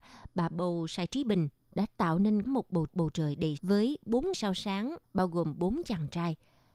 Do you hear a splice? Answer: yes; 5 cuts; at 2.4 s, 2.9 s, 3.6 s, 4.3 s, 5.0 s

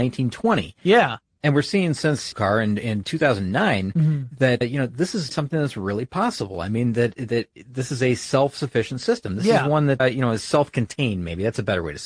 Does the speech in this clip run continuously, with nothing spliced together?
no; 4 cuts; at 2.3 s, 4.6 s, 5.3 s, 10.0 s

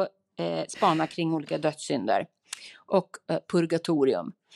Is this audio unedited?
yes; 0 cuts

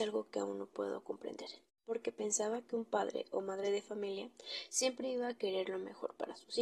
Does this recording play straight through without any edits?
yes; 0 cuts

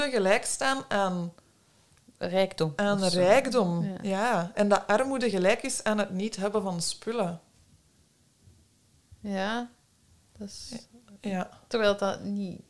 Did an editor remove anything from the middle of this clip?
no; 0 cuts

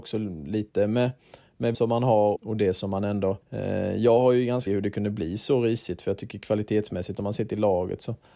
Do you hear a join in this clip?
yes; 4 cuts; at 1.7 s, 2.4 s, 3.4 s, 4.7 s

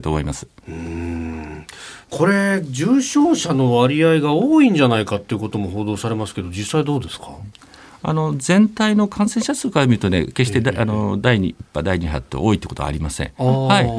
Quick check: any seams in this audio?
no; 0 cuts

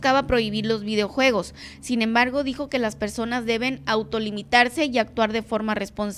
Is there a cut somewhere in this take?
no; 0 cuts

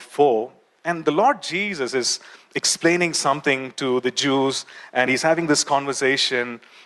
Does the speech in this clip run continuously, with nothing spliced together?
yes; 0 cuts

